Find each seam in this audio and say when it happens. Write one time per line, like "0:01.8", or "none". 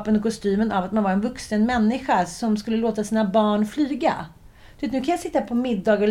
none